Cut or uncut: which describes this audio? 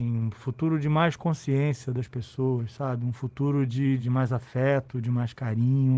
cut